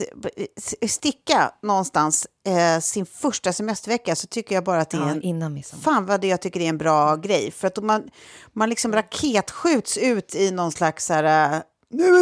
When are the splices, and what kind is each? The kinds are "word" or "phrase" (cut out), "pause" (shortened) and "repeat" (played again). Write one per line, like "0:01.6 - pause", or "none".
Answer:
none